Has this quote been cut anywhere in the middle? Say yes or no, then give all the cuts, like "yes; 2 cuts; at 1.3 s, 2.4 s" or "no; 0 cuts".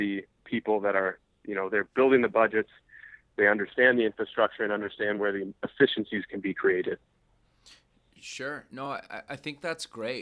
no; 0 cuts